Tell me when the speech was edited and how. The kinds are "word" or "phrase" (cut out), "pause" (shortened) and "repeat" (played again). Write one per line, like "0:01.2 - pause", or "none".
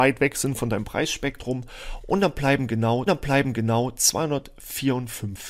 0:03.1 - repeat